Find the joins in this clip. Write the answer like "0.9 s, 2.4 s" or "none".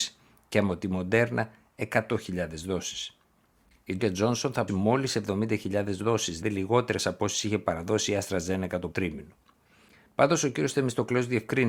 4.0 s, 4.7 s, 6.4 s, 8.9 s